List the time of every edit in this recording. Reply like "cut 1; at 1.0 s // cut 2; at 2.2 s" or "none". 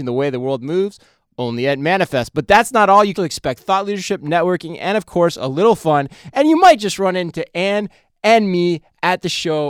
cut 1; at 3.2 s